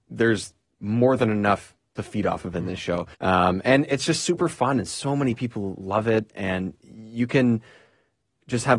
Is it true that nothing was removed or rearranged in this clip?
no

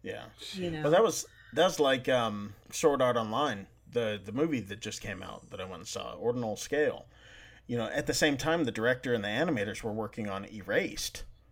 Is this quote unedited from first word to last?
no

